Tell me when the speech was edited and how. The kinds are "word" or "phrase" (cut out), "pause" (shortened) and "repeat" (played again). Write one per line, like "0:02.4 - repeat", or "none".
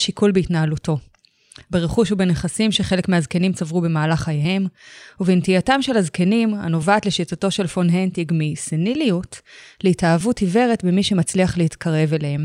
none